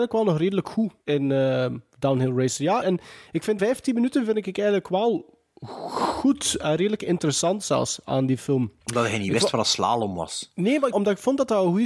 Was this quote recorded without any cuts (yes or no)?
no